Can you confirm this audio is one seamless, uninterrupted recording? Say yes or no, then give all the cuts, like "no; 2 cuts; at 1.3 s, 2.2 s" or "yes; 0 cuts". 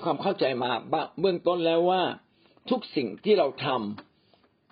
yes; 0 cuts